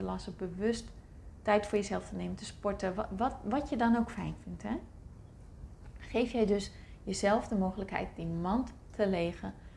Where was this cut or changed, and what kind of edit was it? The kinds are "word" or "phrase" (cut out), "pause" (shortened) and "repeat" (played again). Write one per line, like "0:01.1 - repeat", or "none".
none